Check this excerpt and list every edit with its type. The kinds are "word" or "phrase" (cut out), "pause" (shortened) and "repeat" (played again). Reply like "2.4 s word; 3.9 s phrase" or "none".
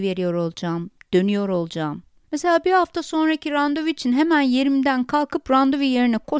none